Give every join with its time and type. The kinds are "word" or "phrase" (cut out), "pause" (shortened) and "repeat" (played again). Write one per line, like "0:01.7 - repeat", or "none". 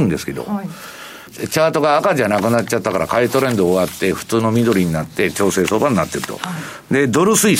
0:01.3 - phrase